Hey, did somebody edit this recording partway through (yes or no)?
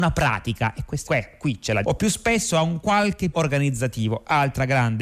yes